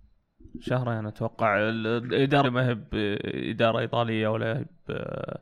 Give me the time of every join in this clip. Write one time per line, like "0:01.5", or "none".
0:02.4